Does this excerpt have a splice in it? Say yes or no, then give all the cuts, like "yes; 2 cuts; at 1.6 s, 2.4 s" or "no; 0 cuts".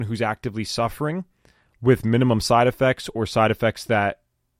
no; 0 cuts